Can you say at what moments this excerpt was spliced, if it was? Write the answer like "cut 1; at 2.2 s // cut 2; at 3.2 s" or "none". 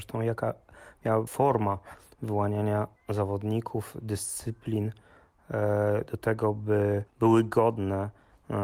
cut 1; at 1.3 s // cut 2; at 3.0 s // cut 3; at 7.1 s